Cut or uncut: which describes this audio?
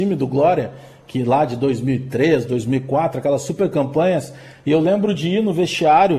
uncut